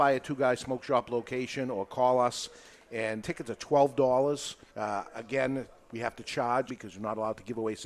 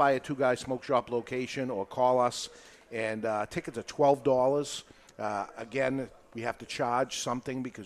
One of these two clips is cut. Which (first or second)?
first